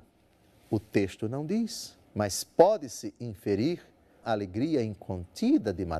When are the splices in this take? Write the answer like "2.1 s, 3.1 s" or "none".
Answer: 2.0 s, 4.2 s